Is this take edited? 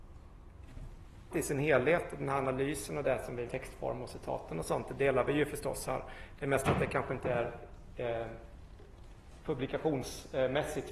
yes; 2 cuts; at 1.3 s, 3.5 s

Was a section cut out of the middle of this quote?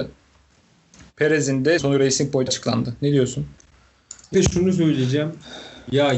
yes; 3 cuts; at 1.8 s, 2.5 s, 4.3 s

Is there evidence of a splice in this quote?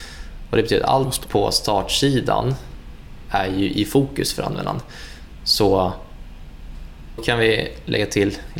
yes; 1 cut; at 7.2 s

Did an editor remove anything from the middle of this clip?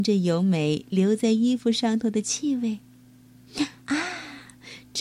yes; 1 cut; at 3.8 s

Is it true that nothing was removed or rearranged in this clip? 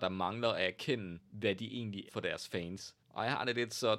no; 3 cuts; at 1.2 s, 2.1 s, 3.0 s

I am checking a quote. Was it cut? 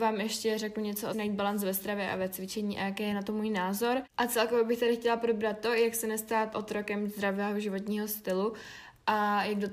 yes; 2 cuts; at 1.1 s, 6.5 s

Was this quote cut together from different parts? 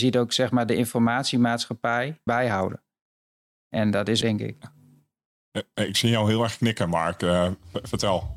yes; 2 cuts; at 2.3 s, 4.2 s

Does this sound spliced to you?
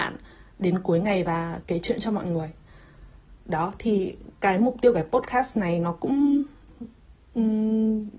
no; 0 cuts

